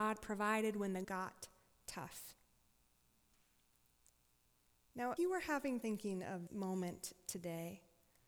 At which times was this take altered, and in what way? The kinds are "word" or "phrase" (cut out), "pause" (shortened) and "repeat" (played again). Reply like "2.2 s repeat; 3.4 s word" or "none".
1.0 s word; 5.2 s word; 5.8 s word; 6.5 s word

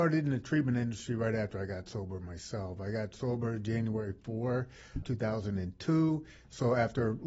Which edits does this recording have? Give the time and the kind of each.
5.0 s word

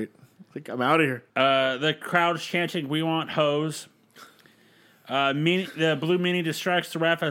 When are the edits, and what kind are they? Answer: 1.3 s pause

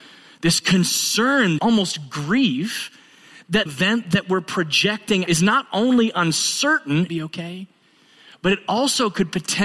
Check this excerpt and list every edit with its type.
1.6 s word; 3.7 s phrase; 5.3 s phrase; 7.1 s phrase

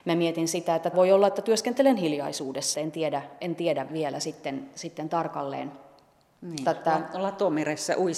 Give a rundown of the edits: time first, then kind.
0.9 s word; 2.7 s word; 3.9 s word; 6.6 s word

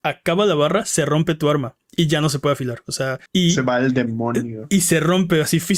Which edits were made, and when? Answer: 3.3 s pause

